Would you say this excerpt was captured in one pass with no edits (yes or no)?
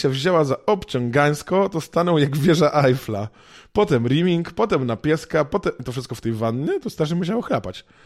yes